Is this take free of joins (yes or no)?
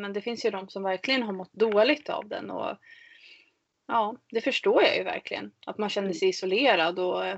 yes